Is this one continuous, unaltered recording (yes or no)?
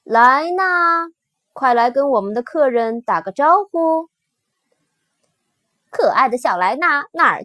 yes